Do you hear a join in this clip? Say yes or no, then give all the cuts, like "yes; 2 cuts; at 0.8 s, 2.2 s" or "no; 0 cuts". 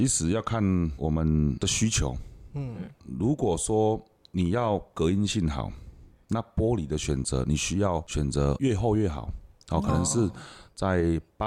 no; 0 cuts